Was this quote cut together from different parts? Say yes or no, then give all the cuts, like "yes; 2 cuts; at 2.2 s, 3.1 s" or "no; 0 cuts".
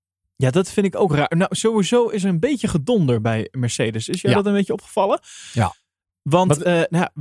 no; 0 cuts